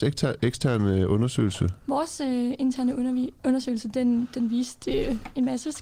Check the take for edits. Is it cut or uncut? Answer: cut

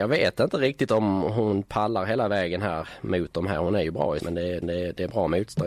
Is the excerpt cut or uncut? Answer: cut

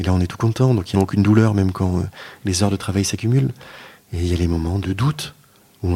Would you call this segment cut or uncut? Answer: cut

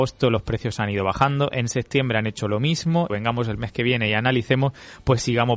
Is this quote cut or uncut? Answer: cut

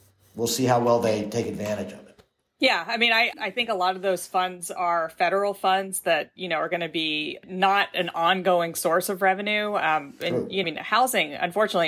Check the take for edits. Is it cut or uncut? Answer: cut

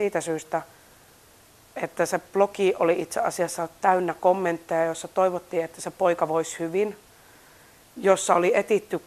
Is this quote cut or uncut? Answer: uncut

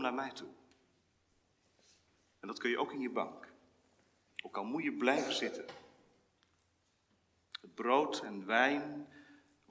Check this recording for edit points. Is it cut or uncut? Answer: uncut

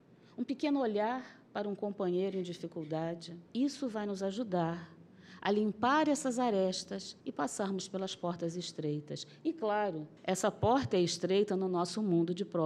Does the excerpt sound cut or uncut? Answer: cut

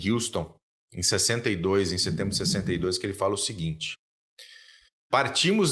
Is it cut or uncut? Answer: uncut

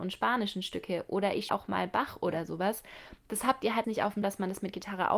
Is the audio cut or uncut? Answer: cut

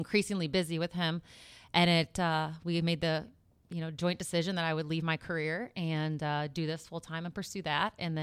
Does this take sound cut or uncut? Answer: uncut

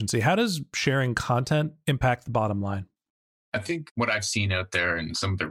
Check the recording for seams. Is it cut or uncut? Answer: uncut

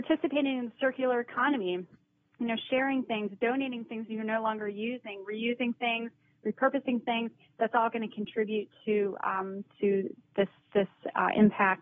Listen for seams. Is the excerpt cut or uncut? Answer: uncut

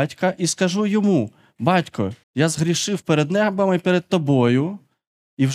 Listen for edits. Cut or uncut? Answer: cut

